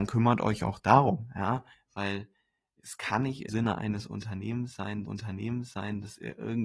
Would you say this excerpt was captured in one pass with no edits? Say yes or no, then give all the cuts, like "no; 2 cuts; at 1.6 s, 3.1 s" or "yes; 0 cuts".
no; 3 cuts; at 1.7 s, 3.5 s, 5.0 s